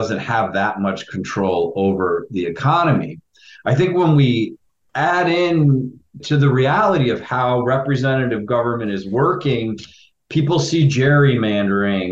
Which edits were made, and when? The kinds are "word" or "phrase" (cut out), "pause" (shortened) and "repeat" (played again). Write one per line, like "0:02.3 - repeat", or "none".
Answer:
0:06.2 - word